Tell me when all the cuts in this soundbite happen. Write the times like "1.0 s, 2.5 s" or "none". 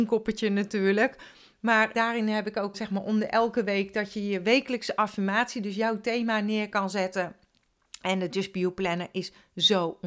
1.9 s, 2.7 s

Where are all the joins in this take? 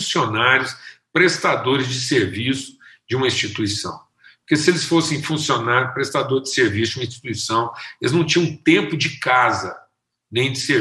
none

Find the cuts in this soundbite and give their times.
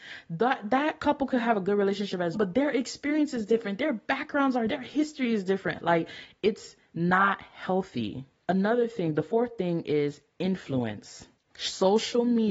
2.3 s, 4.7 s

